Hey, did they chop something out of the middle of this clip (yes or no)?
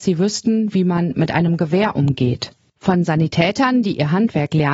no